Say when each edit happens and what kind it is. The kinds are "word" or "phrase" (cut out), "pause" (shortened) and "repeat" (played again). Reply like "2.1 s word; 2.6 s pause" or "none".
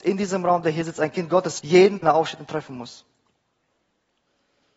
1.6 s word; 2.0 s phrase

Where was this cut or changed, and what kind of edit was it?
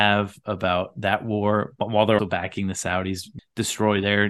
2.2 s word; 3.4 s word

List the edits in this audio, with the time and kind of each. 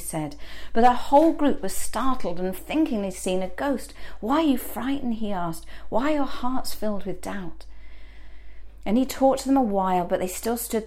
2.6 s word

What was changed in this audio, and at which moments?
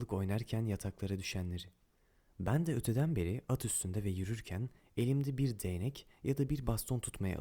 none

